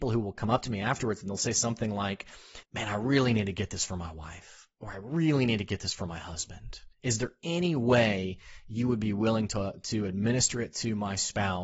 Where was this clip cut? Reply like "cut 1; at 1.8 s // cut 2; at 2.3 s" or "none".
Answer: cut 1; at 2.6 s // cut 2; at 6.9 s